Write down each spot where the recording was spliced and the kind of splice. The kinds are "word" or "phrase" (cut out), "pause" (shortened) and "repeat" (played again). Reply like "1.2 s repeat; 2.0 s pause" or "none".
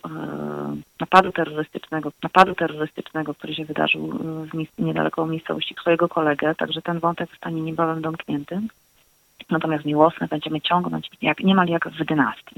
2.1 s repeat; 5.8 s phrase; 7.3 s word; 11.2 s word